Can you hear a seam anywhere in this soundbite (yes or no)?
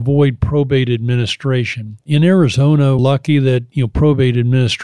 yes